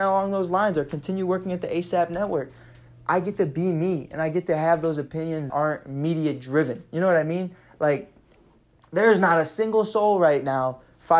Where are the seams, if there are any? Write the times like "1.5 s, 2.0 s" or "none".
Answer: 5.5 s